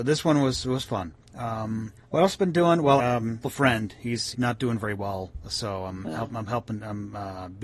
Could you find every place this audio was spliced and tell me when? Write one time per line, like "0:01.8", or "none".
0:02.0
0:03.0
0:03.4
0:04.3